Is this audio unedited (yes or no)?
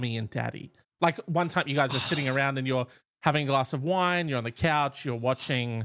yes